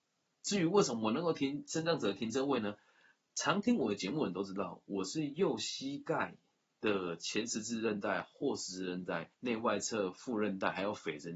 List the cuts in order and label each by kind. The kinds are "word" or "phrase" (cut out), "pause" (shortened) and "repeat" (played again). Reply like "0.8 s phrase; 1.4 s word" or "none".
9.3 s pause